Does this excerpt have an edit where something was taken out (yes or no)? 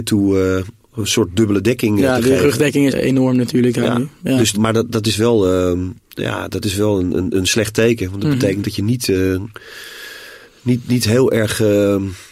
yes